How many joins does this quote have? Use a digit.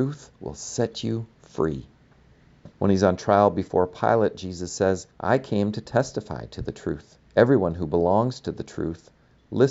3